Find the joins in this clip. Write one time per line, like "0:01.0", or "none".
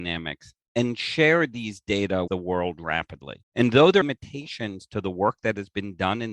0:02.3
0:03.4
0:04.0